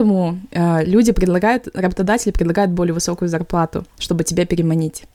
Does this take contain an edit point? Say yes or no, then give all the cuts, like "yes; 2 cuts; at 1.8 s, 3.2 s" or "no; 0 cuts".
no; 0 cuts